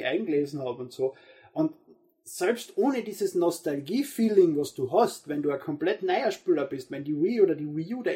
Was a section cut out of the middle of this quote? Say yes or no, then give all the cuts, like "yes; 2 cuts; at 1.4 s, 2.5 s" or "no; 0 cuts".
no; 0 cuts